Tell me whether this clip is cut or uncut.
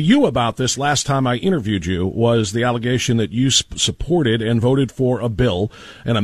uncut